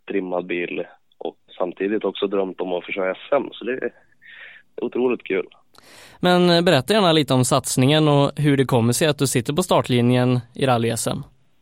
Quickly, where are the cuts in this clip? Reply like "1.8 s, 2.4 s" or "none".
1.5 s